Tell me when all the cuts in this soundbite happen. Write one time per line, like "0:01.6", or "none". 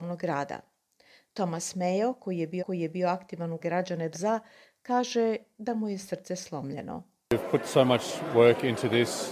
0:02.6
0:03.6
0:04.1